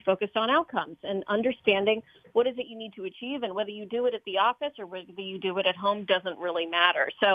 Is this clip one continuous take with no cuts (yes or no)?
yes